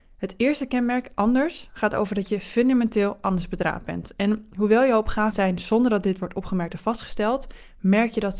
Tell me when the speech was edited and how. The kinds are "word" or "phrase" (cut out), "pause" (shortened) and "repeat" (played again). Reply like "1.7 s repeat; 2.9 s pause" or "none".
5.3 s word